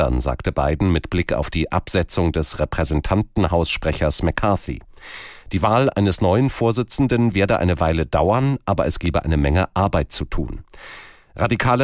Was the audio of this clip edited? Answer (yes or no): no